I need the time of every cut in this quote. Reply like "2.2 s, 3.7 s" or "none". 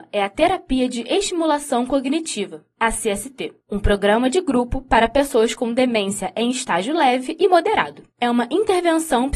3.6 s, 8.1 s